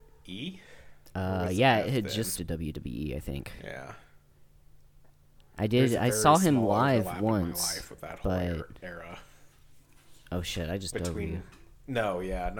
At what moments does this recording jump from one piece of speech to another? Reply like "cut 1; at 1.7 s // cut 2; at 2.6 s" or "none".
cut 1; at 2.4 s // cut 2; at 10.9 s